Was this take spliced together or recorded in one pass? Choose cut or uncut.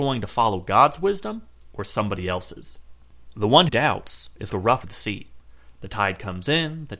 cut